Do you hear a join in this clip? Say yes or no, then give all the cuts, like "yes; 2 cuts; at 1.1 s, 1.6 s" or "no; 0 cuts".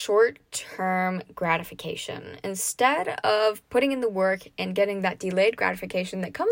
no; 0 cuts